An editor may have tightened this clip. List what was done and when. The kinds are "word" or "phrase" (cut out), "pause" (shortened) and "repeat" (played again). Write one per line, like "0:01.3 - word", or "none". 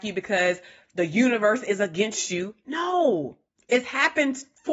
0:03.5 - pause